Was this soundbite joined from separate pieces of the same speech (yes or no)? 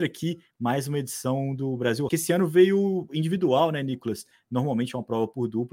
yes